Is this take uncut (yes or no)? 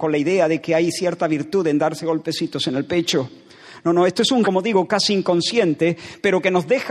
no